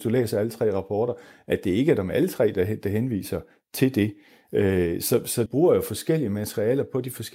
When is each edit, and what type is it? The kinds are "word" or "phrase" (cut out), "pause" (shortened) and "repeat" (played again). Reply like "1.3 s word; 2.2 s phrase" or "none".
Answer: 5.5 s word